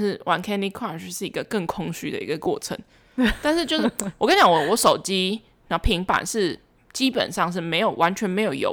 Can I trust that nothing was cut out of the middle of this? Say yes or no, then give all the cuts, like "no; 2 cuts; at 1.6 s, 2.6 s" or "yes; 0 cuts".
yes; 0 cuts